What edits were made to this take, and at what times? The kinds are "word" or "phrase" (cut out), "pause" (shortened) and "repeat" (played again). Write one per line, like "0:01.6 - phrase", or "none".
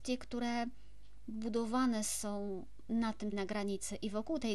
0:03.3 - phrase